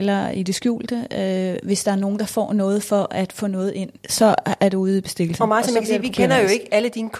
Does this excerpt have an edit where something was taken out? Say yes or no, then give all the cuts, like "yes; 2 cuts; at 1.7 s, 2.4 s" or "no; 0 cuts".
yes; 1 cut; at 4.0 s